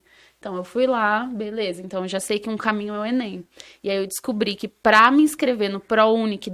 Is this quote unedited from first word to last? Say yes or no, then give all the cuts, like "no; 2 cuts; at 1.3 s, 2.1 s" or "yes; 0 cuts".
yes; 0 cuts